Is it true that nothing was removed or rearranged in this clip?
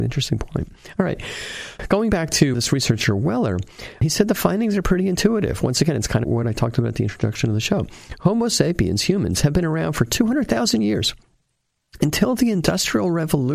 yes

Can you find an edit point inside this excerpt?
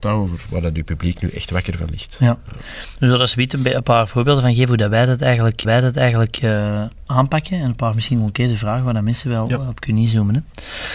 yes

